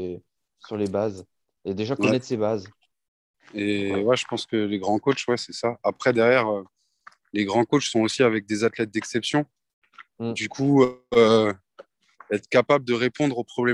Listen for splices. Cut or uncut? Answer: uncut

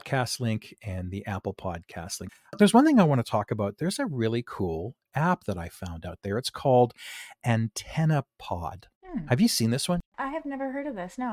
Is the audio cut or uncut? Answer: cut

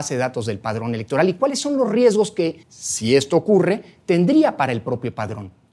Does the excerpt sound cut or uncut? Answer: cut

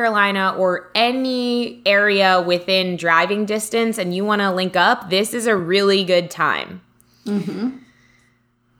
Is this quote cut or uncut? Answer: uncut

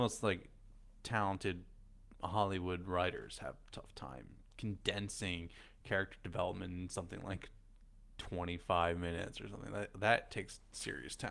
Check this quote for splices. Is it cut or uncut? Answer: uncut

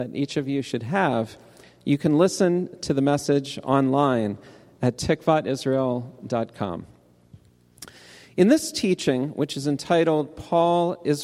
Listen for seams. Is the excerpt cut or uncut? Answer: uncut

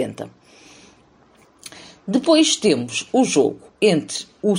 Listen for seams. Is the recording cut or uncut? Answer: uncut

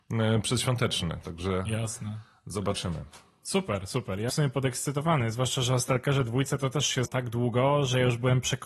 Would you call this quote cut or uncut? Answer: cut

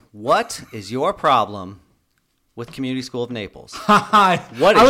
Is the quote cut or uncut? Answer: uncut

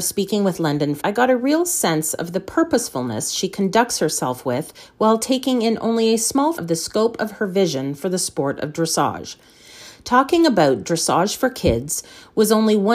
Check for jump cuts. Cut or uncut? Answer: cut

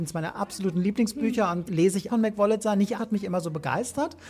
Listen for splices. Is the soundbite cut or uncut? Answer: cut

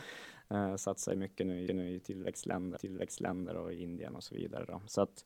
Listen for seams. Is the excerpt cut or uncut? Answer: cut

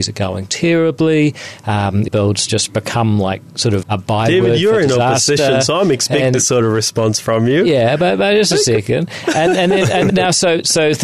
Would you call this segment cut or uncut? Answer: cut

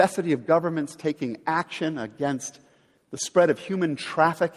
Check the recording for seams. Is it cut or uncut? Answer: uncut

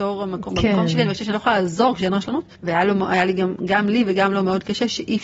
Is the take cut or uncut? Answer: cut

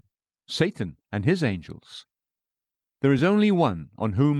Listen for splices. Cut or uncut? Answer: uncut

